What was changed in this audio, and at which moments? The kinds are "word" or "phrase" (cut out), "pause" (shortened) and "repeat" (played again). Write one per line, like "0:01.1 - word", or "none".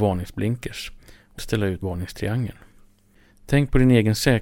0:01.4 - word
0:01.8 - word